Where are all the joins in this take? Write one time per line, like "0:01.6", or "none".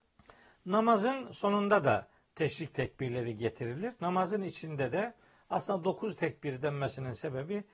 none